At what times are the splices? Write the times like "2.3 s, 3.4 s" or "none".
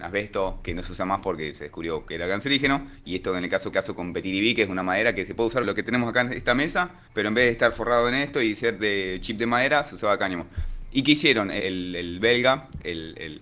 3.7 s, 5.6 s, 7.1 s, 11.6 s